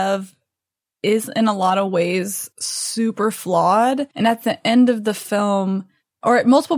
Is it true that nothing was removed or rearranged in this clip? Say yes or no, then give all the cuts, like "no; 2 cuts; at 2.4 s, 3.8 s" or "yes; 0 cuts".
no; 2 cuts; at 2.5 s, 4.1 s